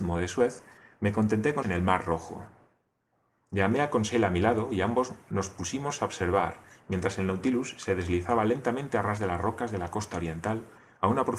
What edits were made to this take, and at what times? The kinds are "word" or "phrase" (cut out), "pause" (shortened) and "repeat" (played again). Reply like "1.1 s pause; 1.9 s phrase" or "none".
1.6 s word